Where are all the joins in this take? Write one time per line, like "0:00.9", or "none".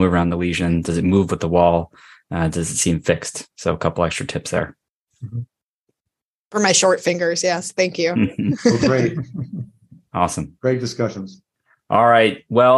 none